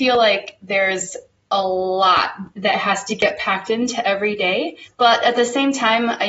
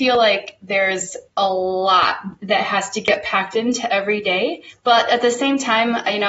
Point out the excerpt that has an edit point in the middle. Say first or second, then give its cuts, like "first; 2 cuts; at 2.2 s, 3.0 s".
second; 1 cut; at 1.3 s